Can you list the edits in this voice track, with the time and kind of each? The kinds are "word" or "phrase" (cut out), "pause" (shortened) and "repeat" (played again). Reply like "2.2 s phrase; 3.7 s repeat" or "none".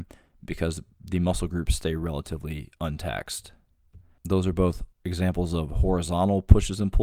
4.9 s pause